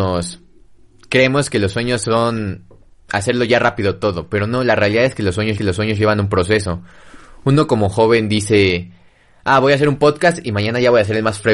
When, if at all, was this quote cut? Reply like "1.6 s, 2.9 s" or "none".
5.6 s

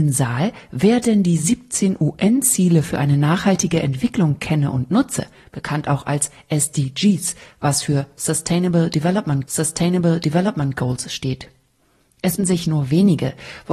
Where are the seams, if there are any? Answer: 9.4 s, 12.4 s

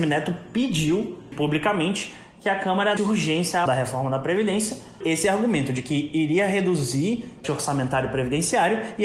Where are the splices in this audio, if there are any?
1.3 s, 3.0 s, 3.7 s, 5.0 s, 7.4 s

